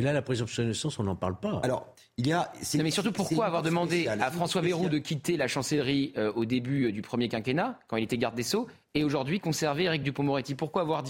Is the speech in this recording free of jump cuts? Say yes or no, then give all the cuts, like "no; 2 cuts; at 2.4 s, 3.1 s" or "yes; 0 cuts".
yes; 0 cuts